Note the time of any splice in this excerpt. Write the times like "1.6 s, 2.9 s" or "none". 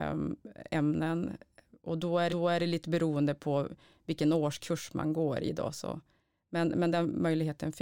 2.3 s